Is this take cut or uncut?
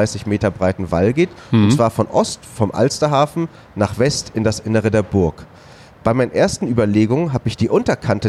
uncut